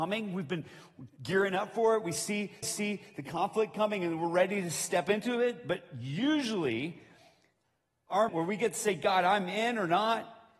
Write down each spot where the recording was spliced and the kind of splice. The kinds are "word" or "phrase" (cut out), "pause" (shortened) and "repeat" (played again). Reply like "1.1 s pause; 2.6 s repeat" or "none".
2.6 s repeat; 8.3 s word

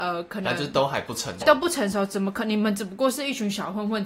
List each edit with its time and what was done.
1.4 s word

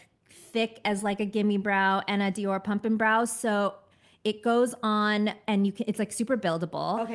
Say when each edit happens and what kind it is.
none

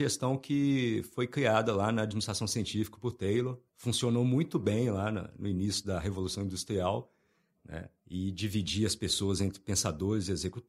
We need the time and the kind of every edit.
3.7 s pause; 8.0 s pause

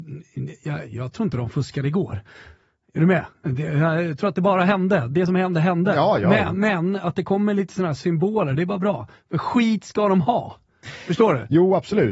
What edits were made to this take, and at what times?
none

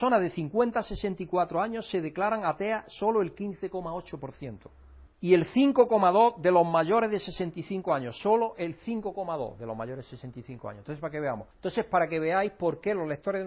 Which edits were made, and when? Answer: 5.1 s pause; 11.5 s pause

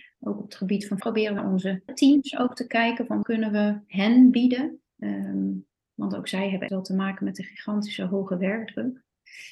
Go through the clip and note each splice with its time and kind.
1.0 s word; 1.4 s word; 1.9 s word; 3.2 s word; 4.9 s pause; 6.7 s word

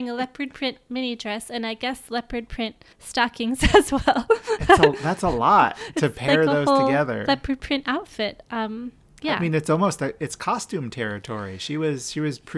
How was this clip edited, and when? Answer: 2.9 s pause

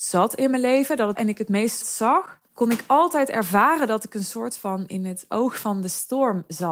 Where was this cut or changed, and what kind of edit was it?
1.1 s phrase; 1.8 s word; 2.5 s pause

